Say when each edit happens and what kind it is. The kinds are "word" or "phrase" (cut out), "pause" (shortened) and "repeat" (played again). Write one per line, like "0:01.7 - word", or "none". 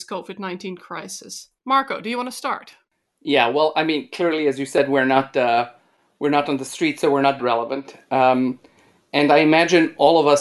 0:01.6 - pause
0:02.8 - pause
0:07.4 - word